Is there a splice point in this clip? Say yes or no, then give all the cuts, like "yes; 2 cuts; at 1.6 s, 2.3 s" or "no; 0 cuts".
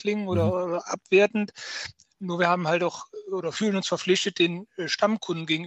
no; 0 cuts